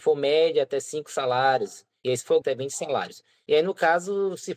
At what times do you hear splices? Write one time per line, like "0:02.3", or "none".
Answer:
0:02.4